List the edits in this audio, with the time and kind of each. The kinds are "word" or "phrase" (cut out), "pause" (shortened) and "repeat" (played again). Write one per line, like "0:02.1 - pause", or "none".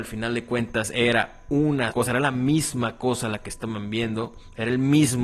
0:01.9 - word